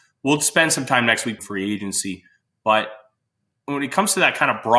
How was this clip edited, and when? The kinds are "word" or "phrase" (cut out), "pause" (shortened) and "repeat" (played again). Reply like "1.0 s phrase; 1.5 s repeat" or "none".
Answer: 1.4 s word